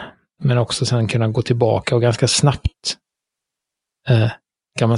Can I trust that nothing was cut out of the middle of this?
yes; 0 cuts

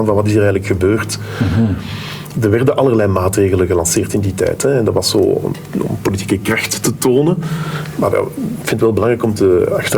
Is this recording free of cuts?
yes; 0 cuts

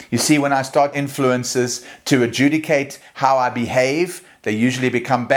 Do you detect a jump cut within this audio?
yes; 1 cut; at 0.9 s

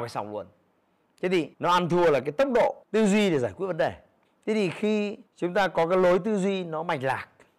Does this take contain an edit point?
yes; 4 cuts; at 1.5 s, 2.8 s, 4.2 s, 5.3 s

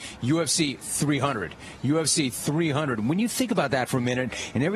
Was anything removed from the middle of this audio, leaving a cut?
no; 0 cuts

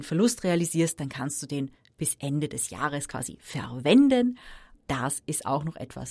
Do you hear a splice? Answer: no; 0 cuts

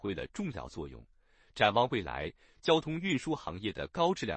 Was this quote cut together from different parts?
no; 0 cuts

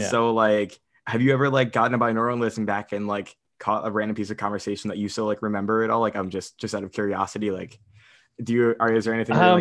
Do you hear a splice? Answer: no; 0 cuts

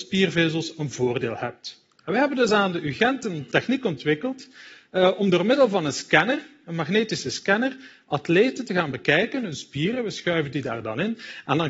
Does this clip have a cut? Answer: no; 0 cuts

